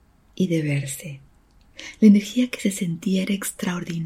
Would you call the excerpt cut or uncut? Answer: uncut